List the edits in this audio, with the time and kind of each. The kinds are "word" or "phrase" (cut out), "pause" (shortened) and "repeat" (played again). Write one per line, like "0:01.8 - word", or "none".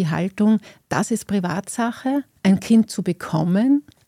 none